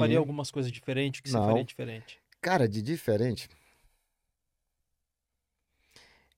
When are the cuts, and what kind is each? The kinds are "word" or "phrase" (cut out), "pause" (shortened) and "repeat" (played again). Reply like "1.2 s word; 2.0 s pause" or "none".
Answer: none